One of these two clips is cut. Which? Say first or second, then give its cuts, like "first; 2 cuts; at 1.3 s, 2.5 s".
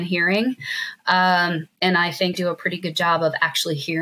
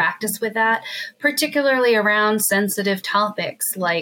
first; 2 cuts; at 1.7 s, 2.3 s